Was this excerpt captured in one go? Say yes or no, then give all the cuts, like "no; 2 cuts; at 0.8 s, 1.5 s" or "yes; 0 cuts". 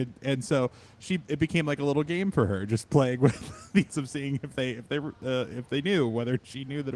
no; 1 cut; at 3.9 s